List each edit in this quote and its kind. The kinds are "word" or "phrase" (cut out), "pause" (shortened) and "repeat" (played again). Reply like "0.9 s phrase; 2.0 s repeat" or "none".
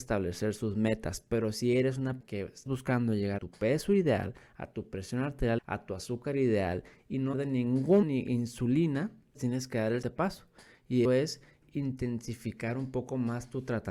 2.2 s word; 2.7 s word; 3.4 s word; 5.6 s word; 7.3 s word; 8.0 s word; 9.3 s word; 10.0 s word; 11.0 s word